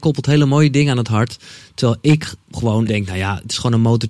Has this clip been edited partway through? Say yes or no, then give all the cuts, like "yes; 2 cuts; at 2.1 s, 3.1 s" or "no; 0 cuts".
yes; 1 cut; at 2.9 s